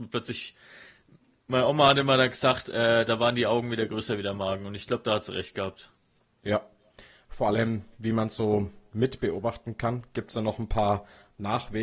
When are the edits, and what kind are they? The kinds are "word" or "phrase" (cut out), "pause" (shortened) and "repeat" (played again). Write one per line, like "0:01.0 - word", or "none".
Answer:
none